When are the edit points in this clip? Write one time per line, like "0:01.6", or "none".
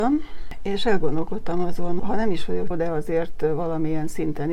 0:02.0
0:02.7